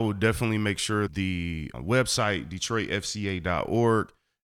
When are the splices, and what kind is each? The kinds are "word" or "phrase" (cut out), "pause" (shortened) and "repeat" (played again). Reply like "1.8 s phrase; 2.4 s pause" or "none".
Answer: 1.1 s word; 1.7 s word

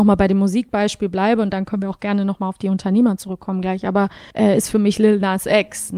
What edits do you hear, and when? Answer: 4.3 s pause

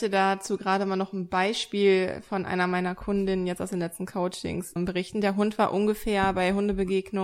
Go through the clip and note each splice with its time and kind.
4.8 s word

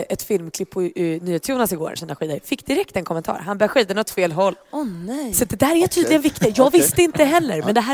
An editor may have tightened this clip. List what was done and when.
2.0 s phrase

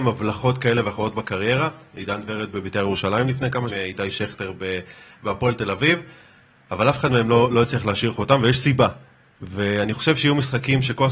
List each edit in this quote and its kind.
3.7 s word

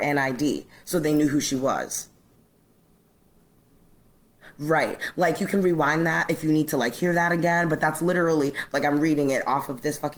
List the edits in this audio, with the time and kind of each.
none

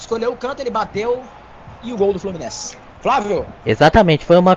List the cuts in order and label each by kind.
none

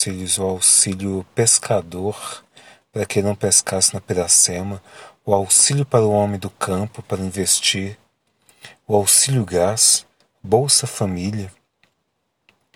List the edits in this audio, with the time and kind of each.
none

